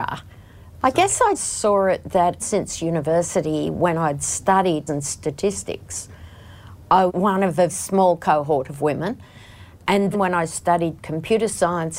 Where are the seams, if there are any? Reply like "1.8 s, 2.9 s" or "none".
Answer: 1.3 s, 2.4 s, 4.9 s, 7.1 s, 7.7 s, 10.1 s